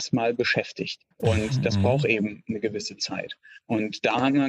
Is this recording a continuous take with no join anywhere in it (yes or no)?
no